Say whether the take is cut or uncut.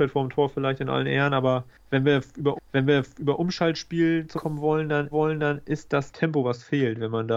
cut